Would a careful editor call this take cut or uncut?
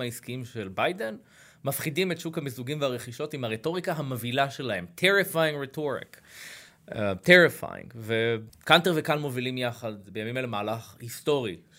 uncut